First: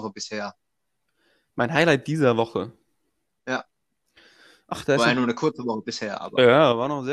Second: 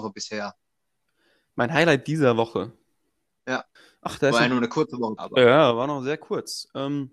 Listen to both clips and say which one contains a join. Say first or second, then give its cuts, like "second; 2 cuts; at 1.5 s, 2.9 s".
second; 2 cuts; at 3.8 s, 5.2 s